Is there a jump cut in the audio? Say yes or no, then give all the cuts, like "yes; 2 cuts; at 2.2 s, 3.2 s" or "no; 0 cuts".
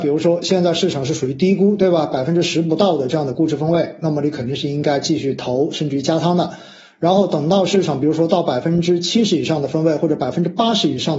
no; 0 cuts